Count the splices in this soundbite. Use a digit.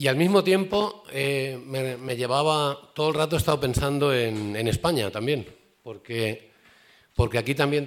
0